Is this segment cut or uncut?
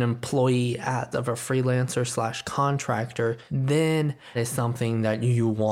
cut